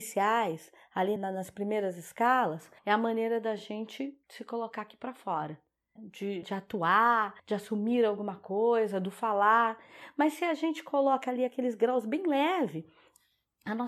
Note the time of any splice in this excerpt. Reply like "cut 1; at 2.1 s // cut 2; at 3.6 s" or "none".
cut 1; at 1.2 s // cut 2; at 2.8 s // cut 3; at 4.2 s // cut 4; at 6.0 s // cut 5; at 6.4 s // cut 6; at 7.4 s